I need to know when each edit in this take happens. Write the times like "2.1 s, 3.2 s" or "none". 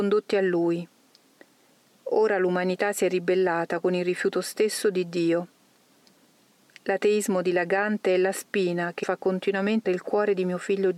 9.0 s, 9.8 s